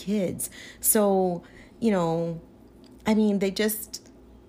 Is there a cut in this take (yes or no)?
no